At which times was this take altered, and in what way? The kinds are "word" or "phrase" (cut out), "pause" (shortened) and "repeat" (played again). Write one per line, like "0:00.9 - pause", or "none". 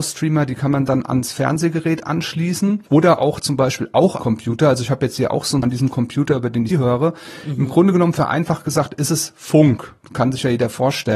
0:02.9 - pause
0:04.2 - word
0:05.6 - word
0:06.7 - word